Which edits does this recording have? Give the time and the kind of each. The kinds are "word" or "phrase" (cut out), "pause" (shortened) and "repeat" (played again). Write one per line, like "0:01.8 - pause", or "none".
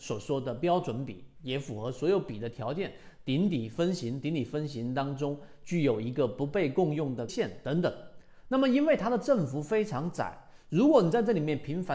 0:07.3 - word